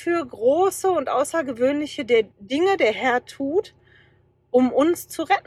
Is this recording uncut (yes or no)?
no